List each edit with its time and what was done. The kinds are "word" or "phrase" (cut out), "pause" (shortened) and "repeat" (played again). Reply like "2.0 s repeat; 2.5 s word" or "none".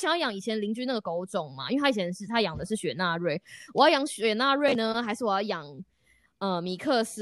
none